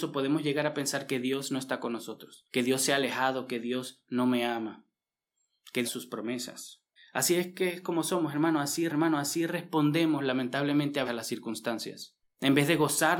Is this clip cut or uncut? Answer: cut